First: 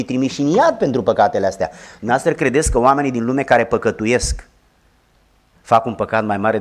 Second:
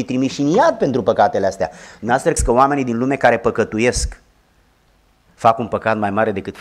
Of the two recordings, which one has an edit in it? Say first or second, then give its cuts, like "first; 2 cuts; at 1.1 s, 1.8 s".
second; 1 cut; at 2.4 s